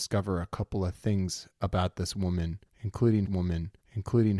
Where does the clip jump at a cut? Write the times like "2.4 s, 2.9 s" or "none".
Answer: 3.2 s